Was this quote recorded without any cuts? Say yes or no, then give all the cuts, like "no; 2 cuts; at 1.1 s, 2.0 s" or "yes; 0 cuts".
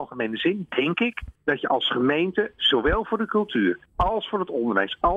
no; 2 cuts; at 1.4 s, 3.9 s